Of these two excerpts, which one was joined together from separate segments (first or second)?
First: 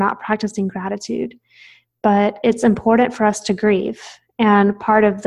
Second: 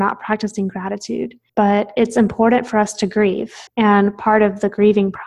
second